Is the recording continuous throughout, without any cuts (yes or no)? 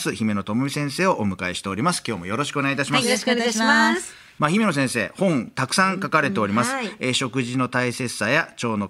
yes